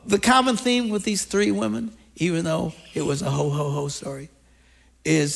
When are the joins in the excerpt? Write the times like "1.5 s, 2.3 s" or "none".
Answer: none